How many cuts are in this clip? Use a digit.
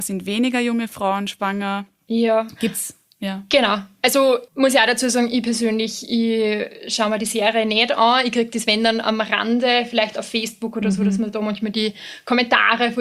1